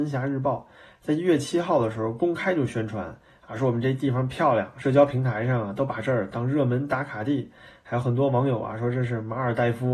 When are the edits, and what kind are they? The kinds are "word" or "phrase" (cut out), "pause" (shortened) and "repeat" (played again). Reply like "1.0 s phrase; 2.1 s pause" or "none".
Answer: none